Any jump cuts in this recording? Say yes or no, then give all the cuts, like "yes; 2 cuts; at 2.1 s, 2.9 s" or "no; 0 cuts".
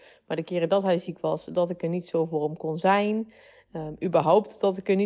no; 0 cuts